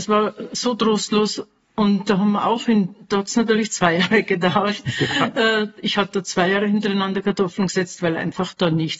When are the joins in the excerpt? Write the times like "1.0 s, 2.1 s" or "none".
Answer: none